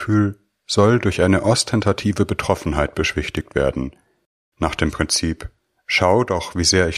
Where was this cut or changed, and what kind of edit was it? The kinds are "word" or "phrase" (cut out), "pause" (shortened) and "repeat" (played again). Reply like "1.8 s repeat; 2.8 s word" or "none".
none